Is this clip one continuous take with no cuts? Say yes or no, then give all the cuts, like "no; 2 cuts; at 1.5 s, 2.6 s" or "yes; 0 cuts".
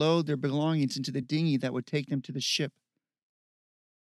yes; 0 cuts